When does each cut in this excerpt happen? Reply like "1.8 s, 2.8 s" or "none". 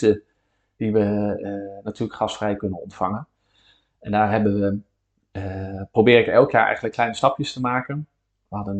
none